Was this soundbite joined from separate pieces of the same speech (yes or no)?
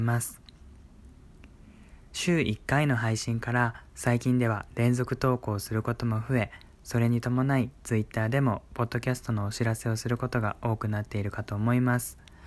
no